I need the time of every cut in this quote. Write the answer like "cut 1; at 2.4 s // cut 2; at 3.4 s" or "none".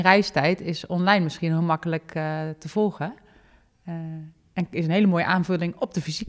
none